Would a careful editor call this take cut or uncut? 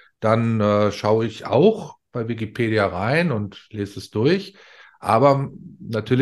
uncut